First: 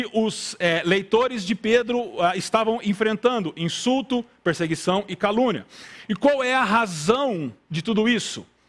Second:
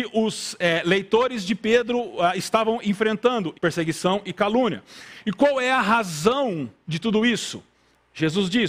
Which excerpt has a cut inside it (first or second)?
second